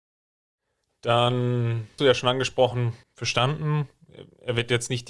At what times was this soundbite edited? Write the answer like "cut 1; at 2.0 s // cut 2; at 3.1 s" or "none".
cut 1; at 2.0 s // cut 2; at 3.0 s